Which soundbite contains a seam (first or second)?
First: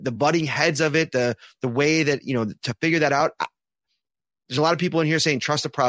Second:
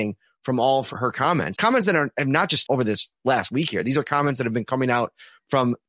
second